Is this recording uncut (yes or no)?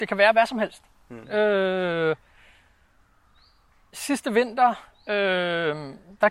yes